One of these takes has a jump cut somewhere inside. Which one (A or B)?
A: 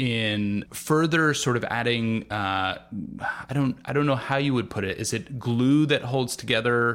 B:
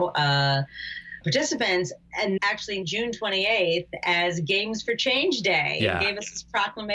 B